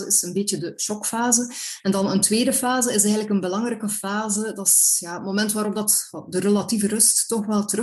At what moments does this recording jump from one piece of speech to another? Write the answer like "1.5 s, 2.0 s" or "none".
none